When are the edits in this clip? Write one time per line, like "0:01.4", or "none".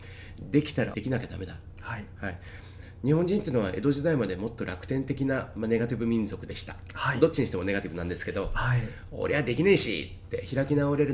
0:00.9